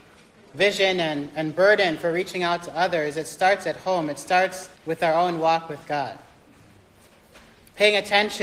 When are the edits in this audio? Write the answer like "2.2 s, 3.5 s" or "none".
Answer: 4.8 s